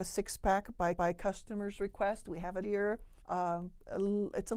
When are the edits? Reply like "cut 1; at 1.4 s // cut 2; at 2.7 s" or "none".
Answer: cut 1; at 0.9 s // cut 2; at 2.6 s // cut 3; at 3.2 s